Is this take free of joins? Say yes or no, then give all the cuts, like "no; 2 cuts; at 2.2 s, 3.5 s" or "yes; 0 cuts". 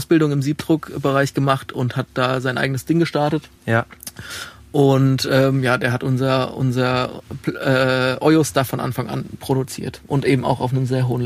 no; 1 cut; at 3.6 s